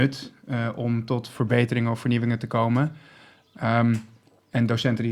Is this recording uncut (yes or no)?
yes